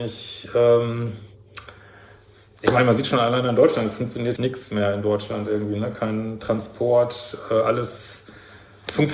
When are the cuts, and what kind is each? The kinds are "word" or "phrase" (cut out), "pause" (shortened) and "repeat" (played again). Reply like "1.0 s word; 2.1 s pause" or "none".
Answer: 4.4 s word